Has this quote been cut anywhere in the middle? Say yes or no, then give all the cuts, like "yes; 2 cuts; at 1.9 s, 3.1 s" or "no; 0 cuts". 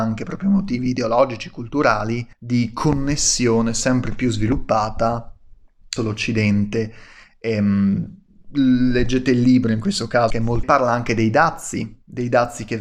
yes; 5 cuts; at 2.3 s, 6.0 s, 8.3 s, 10.3 s, 10.6 s